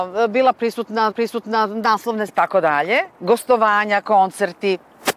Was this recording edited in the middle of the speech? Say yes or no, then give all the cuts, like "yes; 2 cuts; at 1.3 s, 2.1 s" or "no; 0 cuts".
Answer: yes; 3 cuts; at 1.1 s, 2.3 s, 3.1 s